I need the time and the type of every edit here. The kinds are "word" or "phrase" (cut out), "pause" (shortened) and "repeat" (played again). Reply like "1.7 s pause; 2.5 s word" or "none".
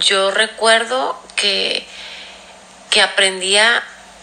none